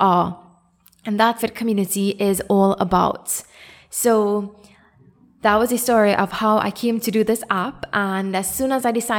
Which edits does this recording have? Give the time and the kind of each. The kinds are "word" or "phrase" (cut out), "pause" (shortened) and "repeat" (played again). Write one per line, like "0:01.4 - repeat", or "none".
0:01.4 - phrase